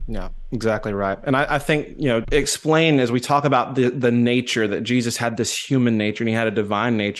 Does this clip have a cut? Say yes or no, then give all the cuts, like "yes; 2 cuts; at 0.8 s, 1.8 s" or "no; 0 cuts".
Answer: yes; 1 cut; at 2.2 s